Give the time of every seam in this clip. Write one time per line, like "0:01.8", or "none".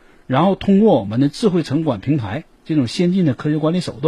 0:02.6